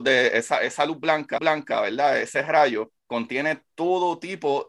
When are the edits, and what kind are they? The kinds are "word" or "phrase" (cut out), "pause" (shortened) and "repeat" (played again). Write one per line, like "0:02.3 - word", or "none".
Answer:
0:01.4 - repeat
0:03.0 - pause

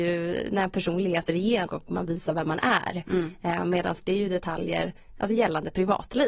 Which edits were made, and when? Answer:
0:01.3 - word
0:01.7 - word
0:04.0 - word

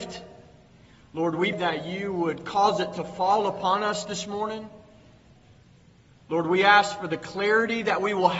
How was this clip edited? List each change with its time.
0:01.5 - word

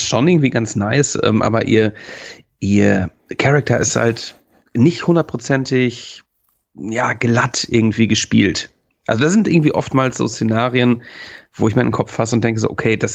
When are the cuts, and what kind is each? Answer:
none

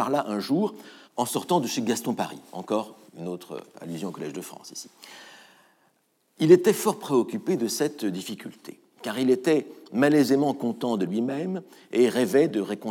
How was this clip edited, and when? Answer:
0:01.0 - pause
0:03.1 - pause

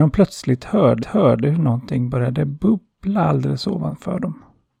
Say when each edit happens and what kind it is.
0:01.0 - repeat

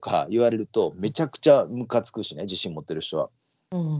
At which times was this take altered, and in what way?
none

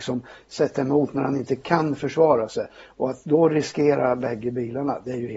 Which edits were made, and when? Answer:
none

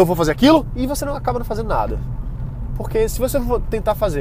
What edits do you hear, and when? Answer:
none

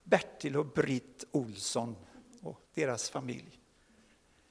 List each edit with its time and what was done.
0:02.7 - pause

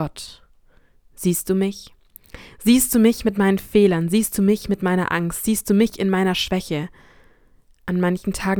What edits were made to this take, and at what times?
none

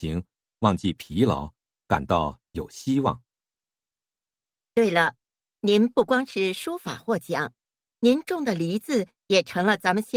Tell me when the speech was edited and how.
none

